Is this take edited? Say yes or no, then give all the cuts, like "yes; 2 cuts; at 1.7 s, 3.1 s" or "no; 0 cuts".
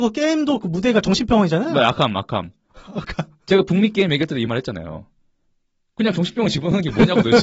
no; 0 cuts